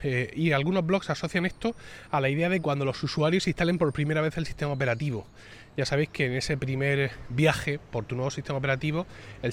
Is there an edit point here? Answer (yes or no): no